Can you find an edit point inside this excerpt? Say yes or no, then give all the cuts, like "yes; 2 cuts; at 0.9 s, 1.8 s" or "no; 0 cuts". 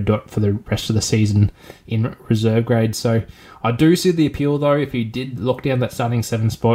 no; 0 cuts